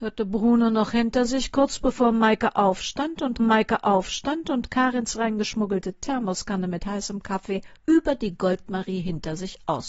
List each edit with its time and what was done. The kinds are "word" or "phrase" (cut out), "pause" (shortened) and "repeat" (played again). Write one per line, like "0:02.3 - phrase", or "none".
0:03.4 - repeat
0:07.8 - pause